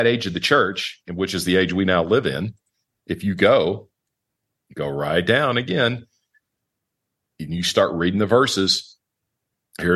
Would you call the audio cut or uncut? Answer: uncut